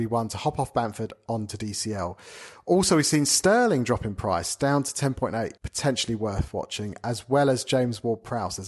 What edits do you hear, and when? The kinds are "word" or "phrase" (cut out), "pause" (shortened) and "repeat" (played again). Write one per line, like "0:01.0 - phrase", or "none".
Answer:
0:05.6 - pause